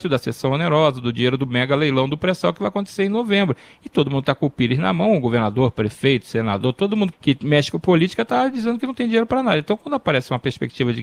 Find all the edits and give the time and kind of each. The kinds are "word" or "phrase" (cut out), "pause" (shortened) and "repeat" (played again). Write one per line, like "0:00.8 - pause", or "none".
0:07.1 - word